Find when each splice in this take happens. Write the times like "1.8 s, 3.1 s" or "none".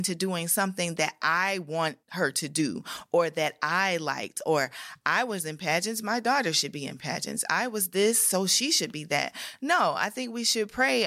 2.0 s